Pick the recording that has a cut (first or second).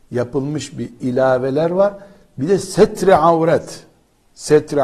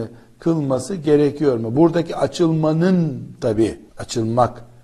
second